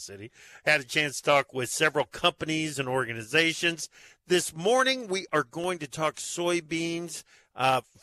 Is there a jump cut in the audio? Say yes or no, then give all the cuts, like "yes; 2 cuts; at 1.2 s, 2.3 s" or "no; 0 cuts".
no; 0 cuts